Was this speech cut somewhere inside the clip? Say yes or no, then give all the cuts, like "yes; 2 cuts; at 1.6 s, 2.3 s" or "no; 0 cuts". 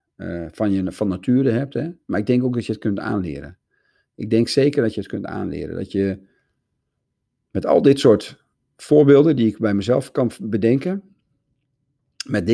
no; 0 cuts